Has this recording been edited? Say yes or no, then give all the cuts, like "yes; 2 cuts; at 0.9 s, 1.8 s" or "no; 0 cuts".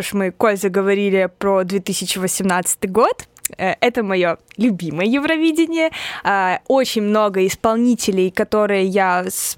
no; 0 cuts